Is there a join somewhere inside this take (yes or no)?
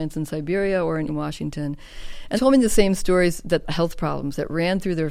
yes